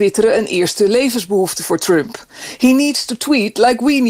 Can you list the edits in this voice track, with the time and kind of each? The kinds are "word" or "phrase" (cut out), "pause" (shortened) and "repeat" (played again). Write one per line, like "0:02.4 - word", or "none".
none